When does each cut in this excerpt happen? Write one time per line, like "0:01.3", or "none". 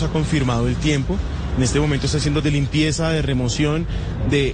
0:02.4